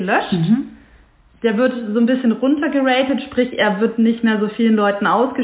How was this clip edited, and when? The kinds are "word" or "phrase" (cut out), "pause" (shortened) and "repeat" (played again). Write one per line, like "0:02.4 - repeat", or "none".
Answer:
none